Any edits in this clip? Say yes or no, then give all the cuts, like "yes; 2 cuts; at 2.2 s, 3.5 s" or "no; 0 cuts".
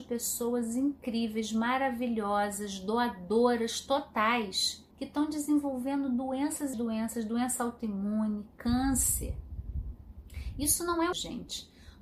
yes; 3 cuts; at 4.9 s, 6.7 s, 11.1 s